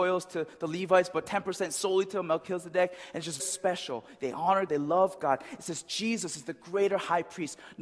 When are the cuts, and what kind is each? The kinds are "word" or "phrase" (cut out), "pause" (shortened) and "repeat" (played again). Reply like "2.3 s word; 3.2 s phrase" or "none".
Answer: 3.4 s word; 4.7 s phrase